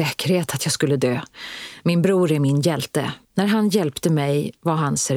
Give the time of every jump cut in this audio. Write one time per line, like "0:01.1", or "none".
0:03.2